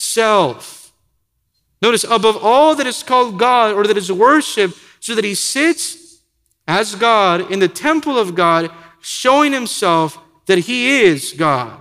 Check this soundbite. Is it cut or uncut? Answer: uncut